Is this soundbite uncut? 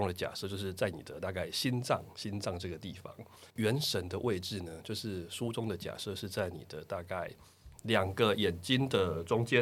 no; 1 cut; at 3.5 s

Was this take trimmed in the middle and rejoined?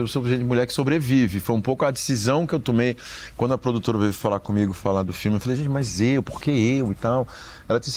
no; 0 cuts

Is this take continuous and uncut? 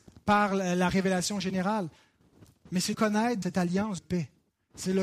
no; 3 cuts; at 2.9 s, 3.4 s, 4.0 s

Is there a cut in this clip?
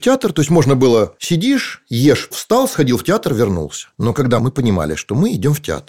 yes; 2 cuts; at 2.3 s, 4.4 s

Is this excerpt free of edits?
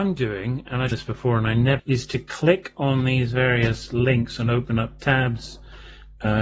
no; 2 cuts; at 0.9 s, 1.8 s

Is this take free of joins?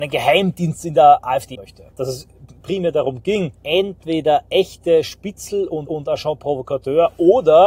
no; 5 cuts; at 1.5 s, 1.9 s, 2.6 s, 3.5 s, 5.9 s

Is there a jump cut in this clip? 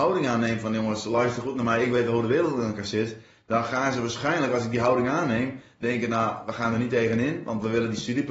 no; 0 cuts

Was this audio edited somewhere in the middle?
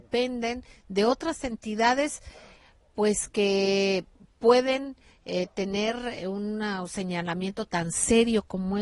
no; 0 cuts

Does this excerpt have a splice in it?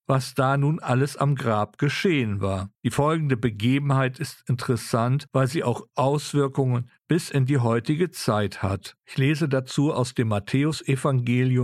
yes; 2 cuts; at 2.7 s, 9.0 s

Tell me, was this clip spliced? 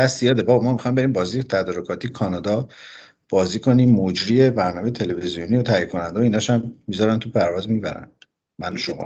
no; 0 cuts

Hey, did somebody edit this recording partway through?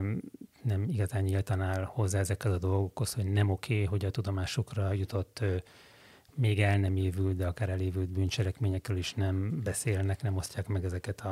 no; 0 cuts

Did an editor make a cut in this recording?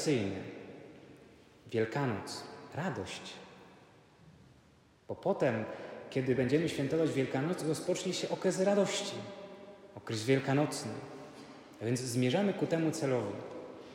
no; 0 cuts

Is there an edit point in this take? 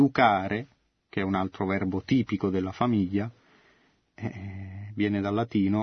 no; 0 cuts

